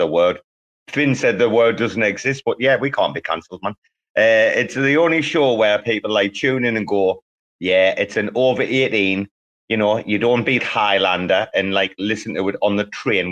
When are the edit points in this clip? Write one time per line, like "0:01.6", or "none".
0:10.6